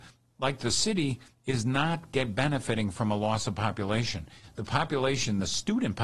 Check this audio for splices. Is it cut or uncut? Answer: uncut